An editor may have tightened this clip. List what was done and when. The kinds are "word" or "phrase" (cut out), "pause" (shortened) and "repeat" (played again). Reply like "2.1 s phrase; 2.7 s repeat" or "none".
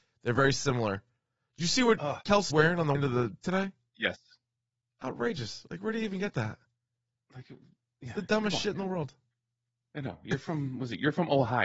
2.5 s word; 2.9 s word; 3.4 s word